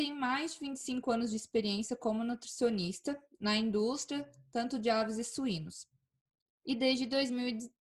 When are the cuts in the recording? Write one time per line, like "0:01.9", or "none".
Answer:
none